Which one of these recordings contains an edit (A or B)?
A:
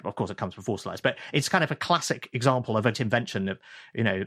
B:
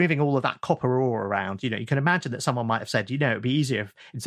A